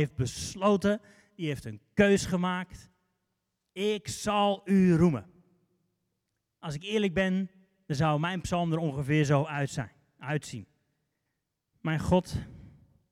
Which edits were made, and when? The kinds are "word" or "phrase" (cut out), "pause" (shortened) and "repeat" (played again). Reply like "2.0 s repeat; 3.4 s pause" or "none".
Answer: none